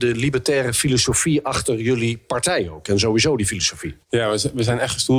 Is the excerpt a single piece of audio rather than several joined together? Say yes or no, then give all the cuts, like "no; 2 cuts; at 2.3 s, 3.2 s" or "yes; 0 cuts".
yes; 0 cuts